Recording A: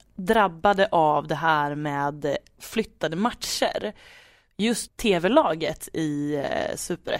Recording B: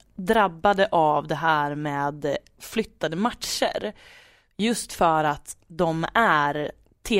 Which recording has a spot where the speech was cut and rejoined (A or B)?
A